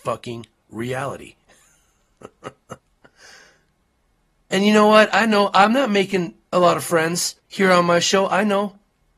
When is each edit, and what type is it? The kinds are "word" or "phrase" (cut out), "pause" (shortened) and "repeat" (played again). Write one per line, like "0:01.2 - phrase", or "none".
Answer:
0:02.8 - pause
0:06.5 - pause
0:07.4 - pause